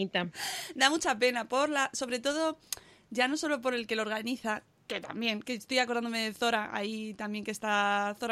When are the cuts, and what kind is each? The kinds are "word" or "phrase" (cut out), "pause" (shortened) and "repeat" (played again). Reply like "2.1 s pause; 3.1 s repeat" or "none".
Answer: none